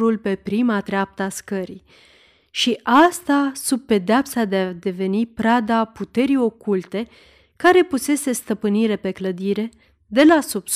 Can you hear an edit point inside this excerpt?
no; 0 cuts

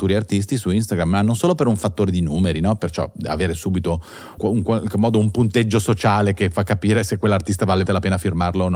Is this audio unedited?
no; 2 cuts; at 4.4 s, 7.9 s

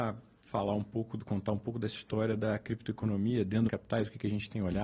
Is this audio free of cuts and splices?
no; 1 cut; at 3.7 s

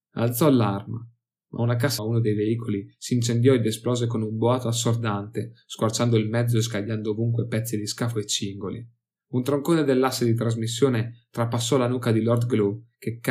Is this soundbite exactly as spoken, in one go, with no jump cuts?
no; 1 cut; at 2.0 s

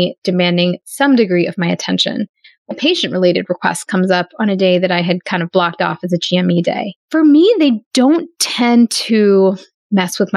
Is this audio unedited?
no; 2 cuts; at 2.7 s, 7.0 s

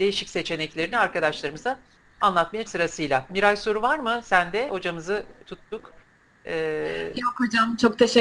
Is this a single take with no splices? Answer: no; 3 cuts; at 2.7 s, 4.7 s, 5.4 s

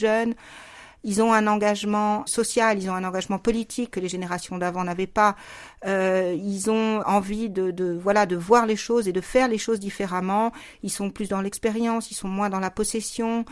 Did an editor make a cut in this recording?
yes; 2 cuts; at 2.3 s, 7.0 s

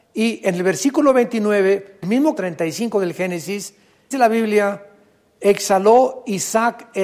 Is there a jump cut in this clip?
yes; 3 cuts; at 2.0 s, 2.4 s, 4.1 s

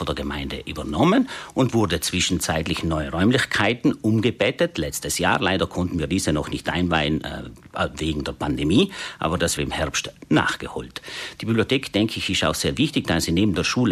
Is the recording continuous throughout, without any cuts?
no; 1 cut; at 9.6 s

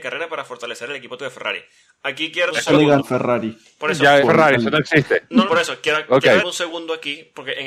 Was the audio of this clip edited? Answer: yes; 6 cuts; at 1.2 s, 2.5 s, 3.0 s, 4.2 s, 5.5 s, 6.4 s

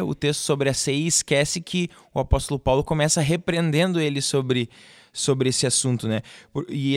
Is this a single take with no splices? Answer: yes; 0 cuts

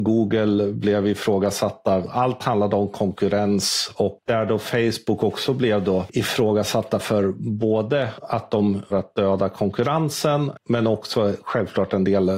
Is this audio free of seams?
no; 1 cut; at 8.9 s

